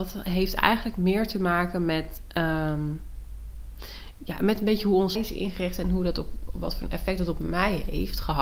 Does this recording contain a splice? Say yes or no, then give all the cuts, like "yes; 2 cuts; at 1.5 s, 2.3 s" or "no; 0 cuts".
yes; 1 cut; at 5.1 s